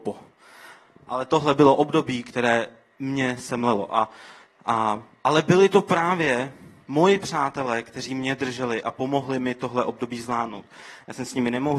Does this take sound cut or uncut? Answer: uncut